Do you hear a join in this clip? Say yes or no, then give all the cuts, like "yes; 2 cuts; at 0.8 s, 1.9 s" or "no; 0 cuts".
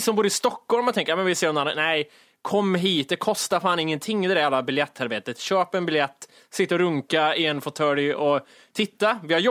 no; 0 cuts